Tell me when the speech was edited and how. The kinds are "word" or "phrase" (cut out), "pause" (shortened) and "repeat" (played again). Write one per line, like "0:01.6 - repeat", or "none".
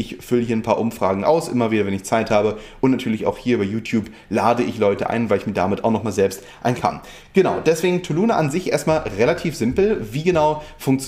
0:06.8 - phrase